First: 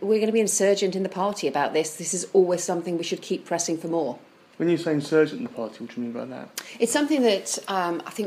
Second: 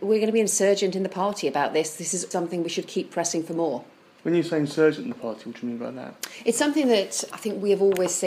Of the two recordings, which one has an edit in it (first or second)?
second